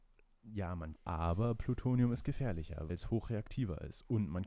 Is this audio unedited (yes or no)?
no